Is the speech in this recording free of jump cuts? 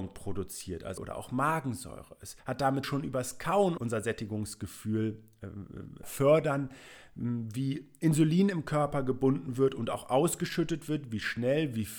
no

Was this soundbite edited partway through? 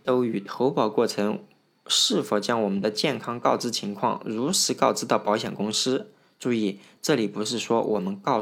no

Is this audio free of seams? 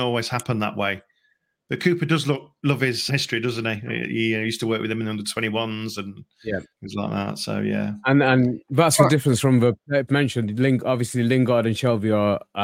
no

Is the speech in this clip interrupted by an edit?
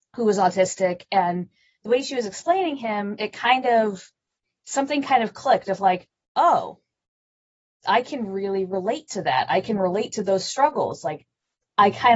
no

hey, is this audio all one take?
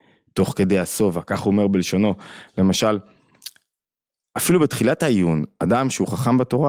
yes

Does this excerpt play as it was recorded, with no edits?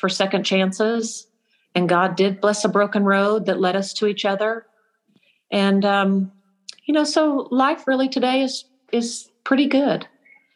yes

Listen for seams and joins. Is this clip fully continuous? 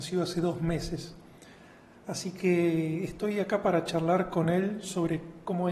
yes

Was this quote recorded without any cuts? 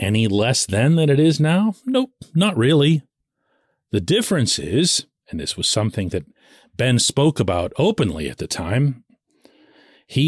yes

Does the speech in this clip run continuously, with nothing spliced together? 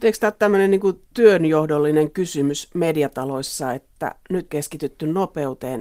no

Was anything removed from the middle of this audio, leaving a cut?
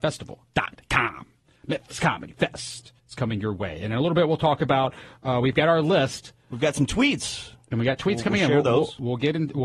yes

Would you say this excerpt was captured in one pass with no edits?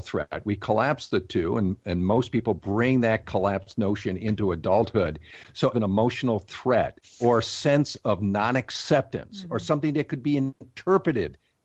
no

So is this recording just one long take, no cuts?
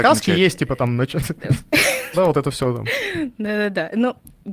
no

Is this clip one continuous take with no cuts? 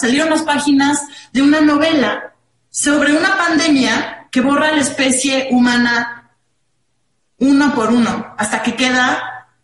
yes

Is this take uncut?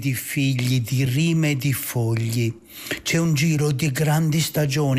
yes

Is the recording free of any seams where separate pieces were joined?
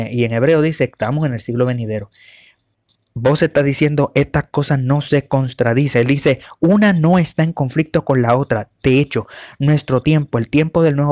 yes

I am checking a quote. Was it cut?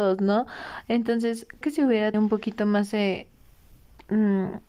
yes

